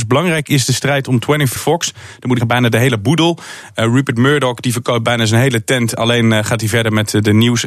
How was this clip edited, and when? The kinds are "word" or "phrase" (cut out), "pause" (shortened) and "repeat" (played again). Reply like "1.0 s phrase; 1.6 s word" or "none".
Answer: 1.6 s word; 2.4 s word